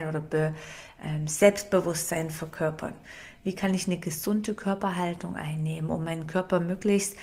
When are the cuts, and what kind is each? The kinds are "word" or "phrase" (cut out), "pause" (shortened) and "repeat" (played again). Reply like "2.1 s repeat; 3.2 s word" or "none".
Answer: none